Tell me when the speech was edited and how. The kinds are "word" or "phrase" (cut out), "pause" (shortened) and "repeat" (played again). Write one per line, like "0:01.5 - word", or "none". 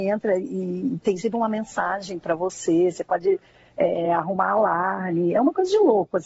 none

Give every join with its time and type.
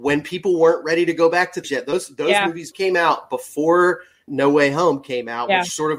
0:01.6 - word
0:02.7 - word
0:04.3 - word

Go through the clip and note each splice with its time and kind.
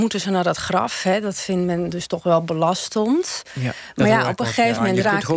none

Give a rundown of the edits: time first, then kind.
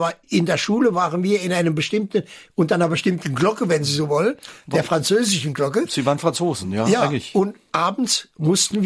none

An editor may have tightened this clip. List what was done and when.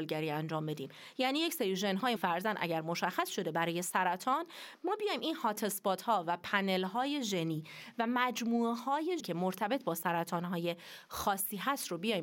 0:02.2 - word
0:09.2 - word

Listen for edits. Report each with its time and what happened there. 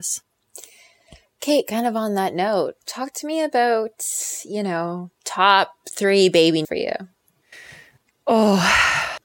0:02.8 - pause
0:05.2 - pause
0:06.6 - word

